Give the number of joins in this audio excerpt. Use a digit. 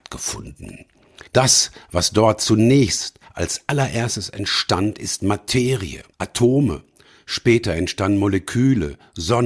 2